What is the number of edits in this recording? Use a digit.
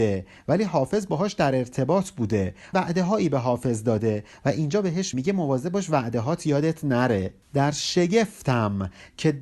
3